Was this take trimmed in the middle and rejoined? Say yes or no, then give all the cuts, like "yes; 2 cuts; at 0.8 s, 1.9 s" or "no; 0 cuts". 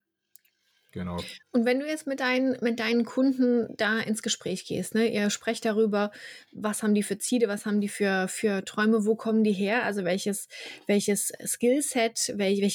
yes; 1 cut; at 1.4 s